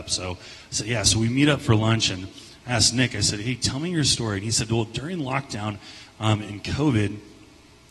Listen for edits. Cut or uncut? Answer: uncut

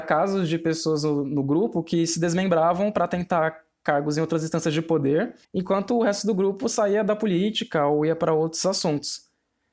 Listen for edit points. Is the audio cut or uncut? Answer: cut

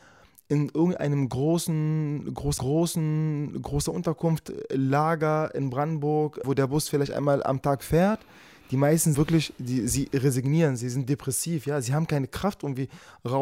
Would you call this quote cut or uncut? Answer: cut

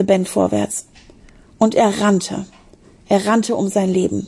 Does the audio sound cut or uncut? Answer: uncut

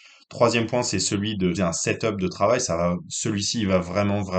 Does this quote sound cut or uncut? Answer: cut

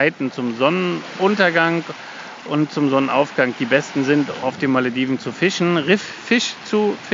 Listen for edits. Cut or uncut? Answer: cut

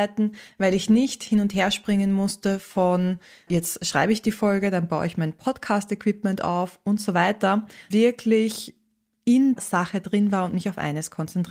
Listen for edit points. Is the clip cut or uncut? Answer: cut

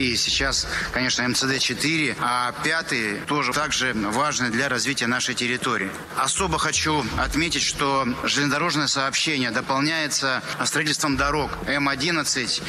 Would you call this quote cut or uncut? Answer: cut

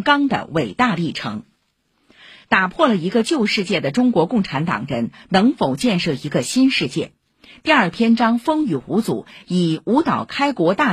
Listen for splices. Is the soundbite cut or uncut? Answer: uncut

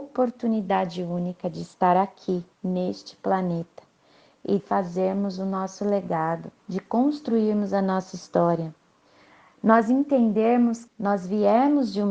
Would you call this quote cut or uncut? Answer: cut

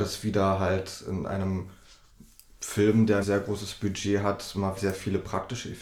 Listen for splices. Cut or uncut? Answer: cut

